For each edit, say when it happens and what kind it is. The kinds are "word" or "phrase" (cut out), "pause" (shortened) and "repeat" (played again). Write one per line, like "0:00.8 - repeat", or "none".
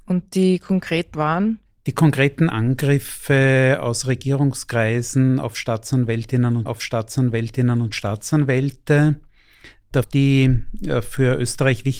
0:01.1 - word
0:02.5 - phrase
0:06.7 - repeat
0:10.0 - word